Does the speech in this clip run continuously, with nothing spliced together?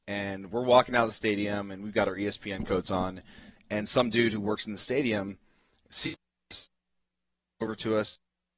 yes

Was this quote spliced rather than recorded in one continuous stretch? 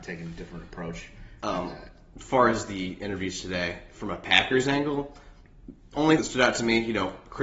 yes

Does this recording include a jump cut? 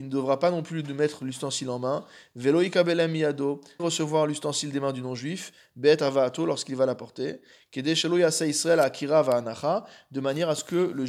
yes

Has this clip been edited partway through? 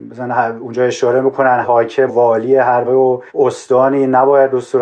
yes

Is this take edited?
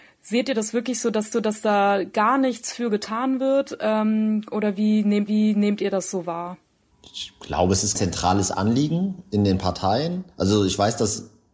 yes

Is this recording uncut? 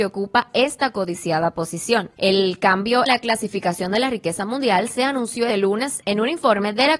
no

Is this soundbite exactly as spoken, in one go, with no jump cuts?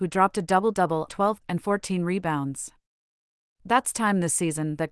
no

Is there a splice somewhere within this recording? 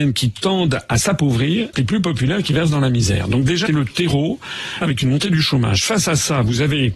yes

